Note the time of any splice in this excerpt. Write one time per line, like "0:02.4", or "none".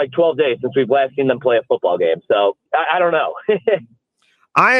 0:02.7